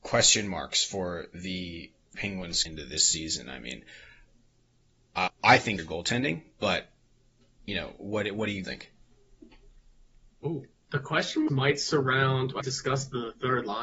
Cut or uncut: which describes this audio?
cut